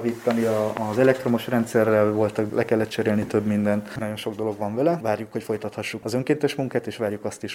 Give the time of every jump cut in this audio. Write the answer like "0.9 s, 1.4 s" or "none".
2.5 s, 4.0 s, 6.0 s